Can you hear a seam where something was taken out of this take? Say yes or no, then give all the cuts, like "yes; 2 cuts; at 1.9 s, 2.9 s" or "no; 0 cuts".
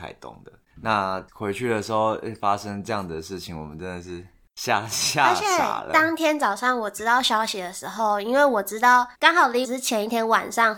yes; 3 cuts; at 1.3 s, 9.1 s, 9.6 s